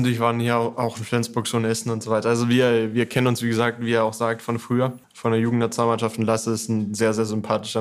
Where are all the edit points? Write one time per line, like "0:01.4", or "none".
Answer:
0:05.0